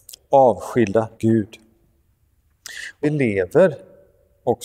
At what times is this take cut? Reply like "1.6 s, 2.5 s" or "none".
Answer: 1.1 s, 3.0 s

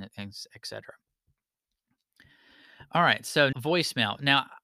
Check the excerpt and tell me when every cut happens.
3.5 s

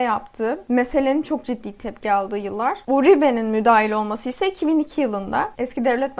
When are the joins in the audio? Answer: none

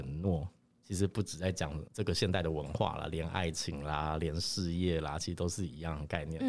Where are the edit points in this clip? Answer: 1.9 s

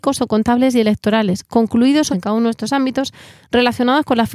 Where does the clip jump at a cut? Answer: 2.1 s

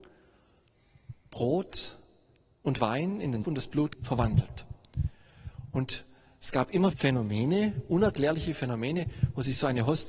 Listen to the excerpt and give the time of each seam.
3.4 s, 3.9 s, 6.9 s

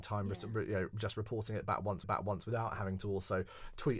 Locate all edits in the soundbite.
2.0 s

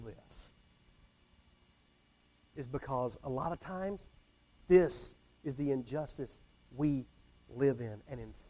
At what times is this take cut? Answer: none

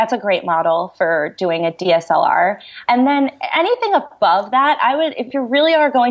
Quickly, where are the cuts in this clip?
none

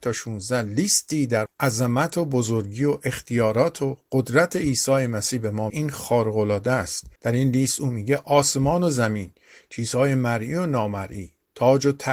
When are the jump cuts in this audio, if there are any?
1.5 s, 5.7 s, 7.2 s

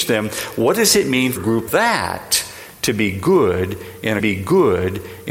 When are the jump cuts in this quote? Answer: 1.4 s, 1.7 s, 4.2 s

